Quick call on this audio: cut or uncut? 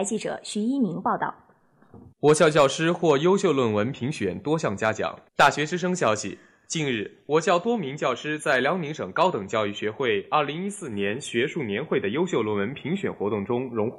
cut